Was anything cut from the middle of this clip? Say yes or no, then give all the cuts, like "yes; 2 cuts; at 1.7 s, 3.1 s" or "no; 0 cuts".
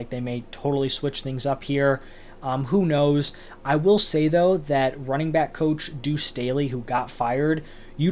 no; 0 cuts